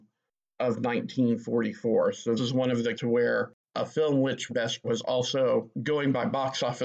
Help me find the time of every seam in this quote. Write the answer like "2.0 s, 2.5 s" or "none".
2.4 s, 2.9 s, 3.6 s, 4.5 s, 4.8 s, 5.7 s

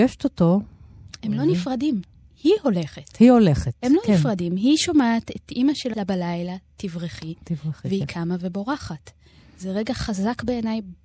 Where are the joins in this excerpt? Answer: 5.9 s

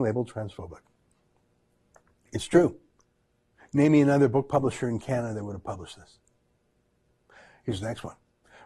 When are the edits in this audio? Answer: none

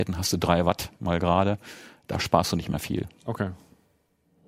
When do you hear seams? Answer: none

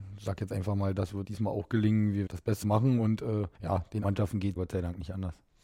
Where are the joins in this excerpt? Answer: 1.2 s, 2.3 s, 2.6 s, 3.5 s, 4.0 s, 4.6 s

